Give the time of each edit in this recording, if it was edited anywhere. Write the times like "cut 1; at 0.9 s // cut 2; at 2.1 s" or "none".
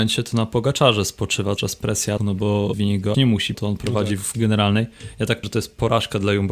cut 1; at 1.6 s // cut 2; at 2.2 s // cut 3; at 2.7 s // cut 4; at 3.1 s // cut 5; at 3.5 s // cut 6; at 4.3 s // cut 7; at 5.4 s